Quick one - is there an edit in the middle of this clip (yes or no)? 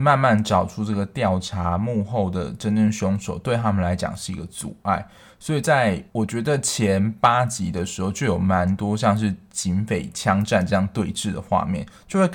yes